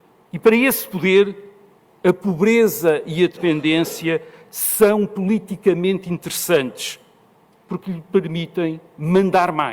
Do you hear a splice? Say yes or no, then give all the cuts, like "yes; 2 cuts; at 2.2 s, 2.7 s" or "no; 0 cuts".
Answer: no; 0 cuts